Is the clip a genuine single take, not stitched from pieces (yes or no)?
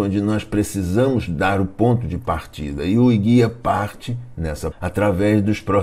no